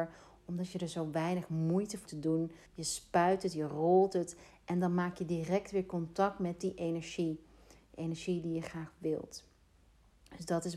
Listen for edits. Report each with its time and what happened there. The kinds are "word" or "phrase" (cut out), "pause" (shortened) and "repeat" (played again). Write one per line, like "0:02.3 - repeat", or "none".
0:02.1 - word
0:02.7 - pause

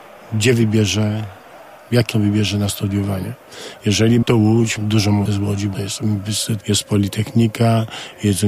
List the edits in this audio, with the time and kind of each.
0:02.1 - word
0:04.2 - word
0:04.8 - word
0:05.3 - word
0:05.7 - word
0:06.6 - word

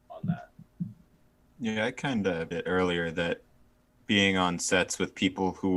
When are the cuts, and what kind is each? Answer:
0:01.2 - pause
0:02.5 - word

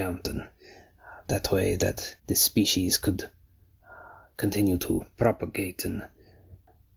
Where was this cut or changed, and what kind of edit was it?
0:02.2 - pause

